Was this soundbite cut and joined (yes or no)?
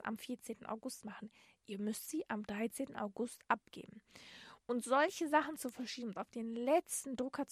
no